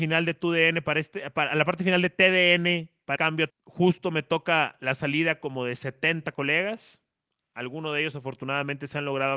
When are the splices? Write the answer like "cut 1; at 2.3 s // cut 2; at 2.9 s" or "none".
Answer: cut 1; at 3.2 s // cut 2; at 3.5 s